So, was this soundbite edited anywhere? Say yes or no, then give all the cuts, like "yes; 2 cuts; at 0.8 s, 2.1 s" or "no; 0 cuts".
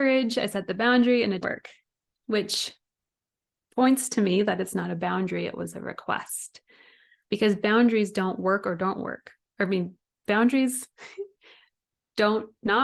yes; 1 cut; at 1.4 s